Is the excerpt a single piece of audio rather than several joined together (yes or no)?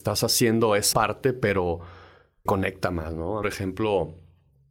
no